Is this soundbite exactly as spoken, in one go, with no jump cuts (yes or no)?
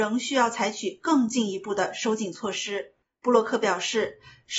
no